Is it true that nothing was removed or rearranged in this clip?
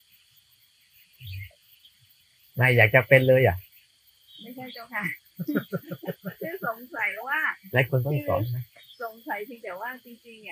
yes; 0 cuts

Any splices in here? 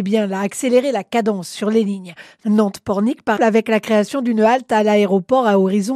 yes; 1 cut; at 3.4 s

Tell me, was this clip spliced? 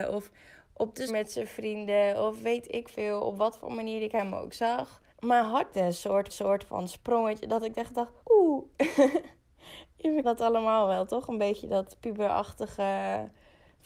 yes; 6 cuts; at 1.1 s, 5.1 s, 5.7 s, 6.3 s, 8.2 s, 10.2 s

